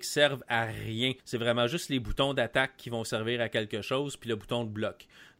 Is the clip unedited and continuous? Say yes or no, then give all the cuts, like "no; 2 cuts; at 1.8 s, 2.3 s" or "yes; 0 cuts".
no; 1 cut; at 1.2 s